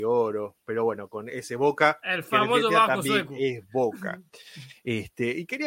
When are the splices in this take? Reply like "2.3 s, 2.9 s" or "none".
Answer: none